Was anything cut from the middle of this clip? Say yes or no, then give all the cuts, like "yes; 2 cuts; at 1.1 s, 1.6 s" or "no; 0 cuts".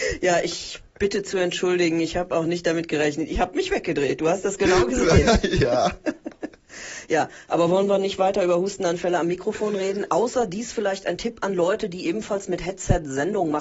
no; 0 cuts